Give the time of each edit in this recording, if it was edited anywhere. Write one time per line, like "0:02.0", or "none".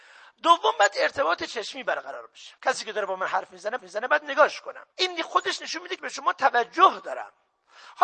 0:02.6
0:03.8
0:04.9
0:06.0